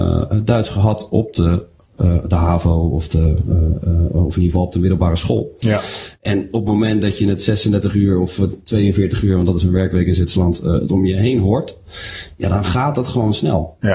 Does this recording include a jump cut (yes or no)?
no